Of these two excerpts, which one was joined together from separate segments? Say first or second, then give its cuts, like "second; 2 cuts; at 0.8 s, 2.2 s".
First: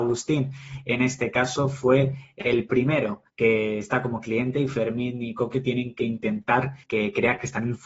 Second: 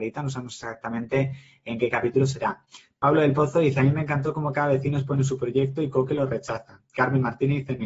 first; 2 cuts; at 3.3 s, 6.8 s